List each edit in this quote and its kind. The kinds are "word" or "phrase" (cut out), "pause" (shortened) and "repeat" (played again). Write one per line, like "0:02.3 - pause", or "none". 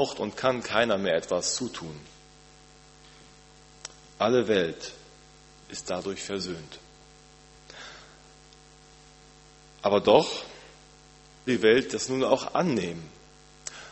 0:11.5 - word